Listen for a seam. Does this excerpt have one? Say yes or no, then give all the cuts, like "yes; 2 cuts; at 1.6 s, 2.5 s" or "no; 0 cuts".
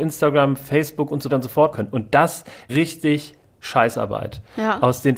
yes; 3 cuts; at 1.3 s, 1.7 s, 2.7 s